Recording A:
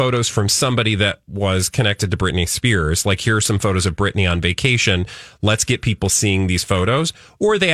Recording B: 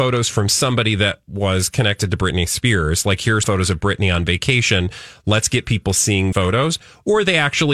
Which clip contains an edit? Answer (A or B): B